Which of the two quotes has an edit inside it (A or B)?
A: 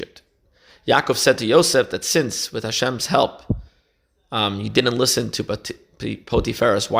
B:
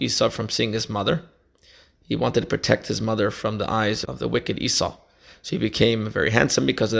B